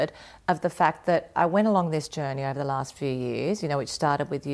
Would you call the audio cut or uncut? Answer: uncut